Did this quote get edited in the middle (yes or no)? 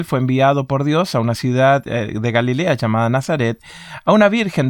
no